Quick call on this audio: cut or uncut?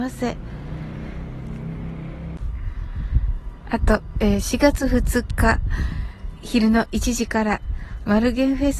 cut